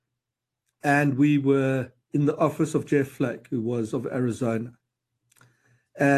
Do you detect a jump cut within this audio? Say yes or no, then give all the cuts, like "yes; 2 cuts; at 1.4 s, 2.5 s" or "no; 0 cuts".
yes; 1 cut; at 2.0 s